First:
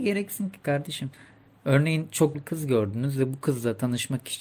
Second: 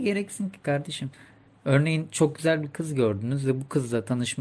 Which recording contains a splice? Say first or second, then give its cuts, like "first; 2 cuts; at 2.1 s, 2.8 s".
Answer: first; 1 cut; at 2.3 s